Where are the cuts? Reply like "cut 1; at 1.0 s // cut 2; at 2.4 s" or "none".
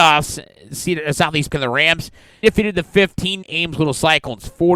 cut 1; at 1.5 s // cut 2; at 2.4 s // cut 3; at 3.4 s